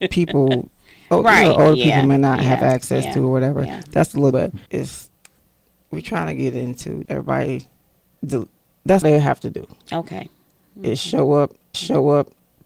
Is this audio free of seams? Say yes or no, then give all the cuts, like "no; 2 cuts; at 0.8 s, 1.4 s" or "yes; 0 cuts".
no; 5 cuts; at 4.3 s, 4.7 s, 7.0 s, 9.0 s, 11.7 s